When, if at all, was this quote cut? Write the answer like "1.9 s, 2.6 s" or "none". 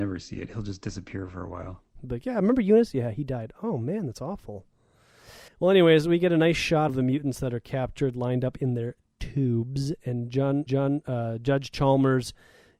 5.5 s, 6.9 s, 10.7 s